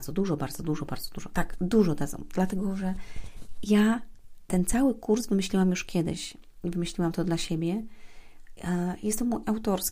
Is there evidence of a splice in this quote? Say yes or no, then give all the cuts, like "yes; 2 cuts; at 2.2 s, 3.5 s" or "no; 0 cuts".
no; 0 cuts